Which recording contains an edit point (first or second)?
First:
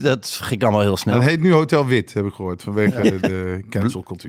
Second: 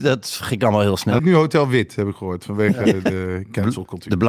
second